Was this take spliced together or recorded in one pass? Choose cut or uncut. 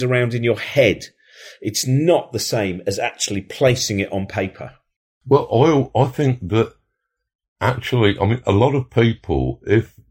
uncut